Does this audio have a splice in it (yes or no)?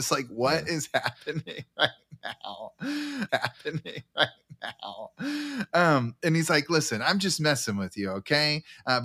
yes